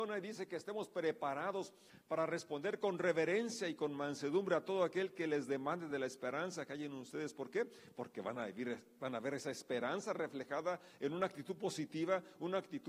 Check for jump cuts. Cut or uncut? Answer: uncut